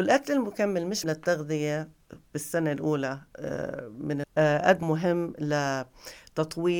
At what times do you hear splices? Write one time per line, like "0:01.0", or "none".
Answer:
0:01.0
0:04.2
0:04.8